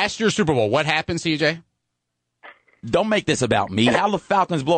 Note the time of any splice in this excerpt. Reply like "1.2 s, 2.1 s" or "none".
none